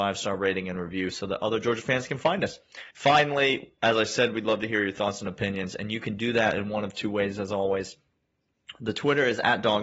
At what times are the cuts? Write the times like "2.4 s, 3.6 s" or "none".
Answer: 2.9 s